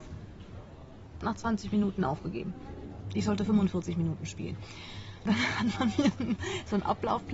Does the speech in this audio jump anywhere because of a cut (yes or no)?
yes